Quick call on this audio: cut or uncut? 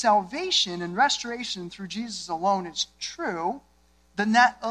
uncut